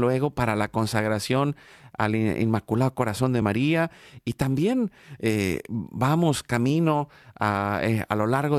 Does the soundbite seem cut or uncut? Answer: uncut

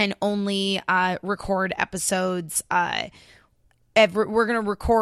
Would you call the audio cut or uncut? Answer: uncut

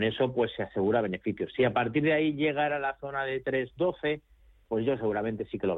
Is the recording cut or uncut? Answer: uncut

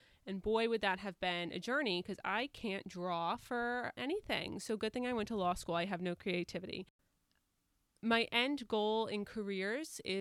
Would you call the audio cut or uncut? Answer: cut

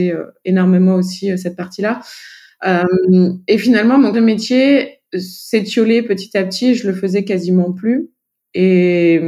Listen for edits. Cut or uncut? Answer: cut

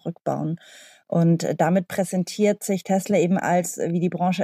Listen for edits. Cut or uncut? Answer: uncut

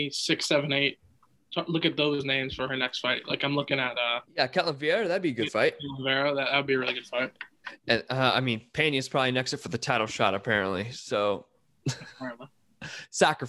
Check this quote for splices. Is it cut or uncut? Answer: uncut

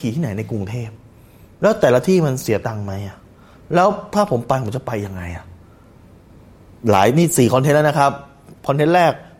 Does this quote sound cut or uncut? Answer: uncut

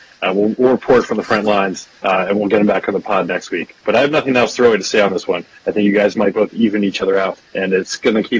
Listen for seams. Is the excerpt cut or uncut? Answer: cut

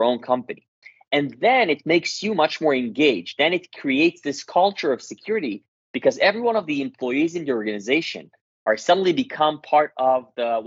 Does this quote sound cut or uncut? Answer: uncut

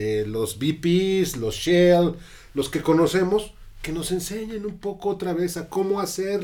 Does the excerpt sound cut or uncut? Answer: cut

